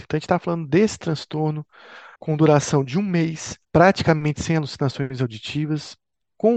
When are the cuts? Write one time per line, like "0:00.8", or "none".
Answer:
0:02.2
0:03.6